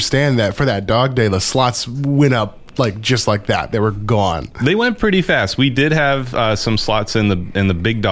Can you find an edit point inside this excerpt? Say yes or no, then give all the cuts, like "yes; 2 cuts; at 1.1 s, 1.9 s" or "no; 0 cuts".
no; 0 cuts